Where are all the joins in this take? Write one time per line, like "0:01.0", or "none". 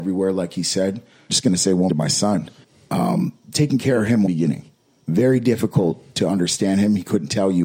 0:01.3
0:01.9
0:02.6
0:04.3